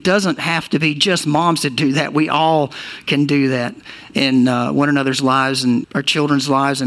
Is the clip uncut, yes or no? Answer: no